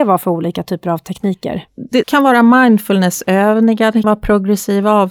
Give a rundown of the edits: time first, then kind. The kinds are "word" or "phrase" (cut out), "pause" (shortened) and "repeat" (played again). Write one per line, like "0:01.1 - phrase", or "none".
0:02.0 - word
0:04.0 - word